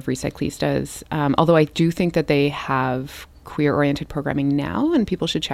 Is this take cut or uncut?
cut